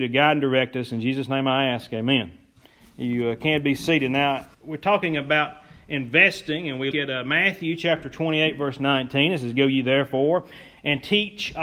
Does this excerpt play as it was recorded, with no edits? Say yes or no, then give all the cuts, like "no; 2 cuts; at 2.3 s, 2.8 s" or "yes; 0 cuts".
no; 2 cuts; at 4.5 s, 6.9 s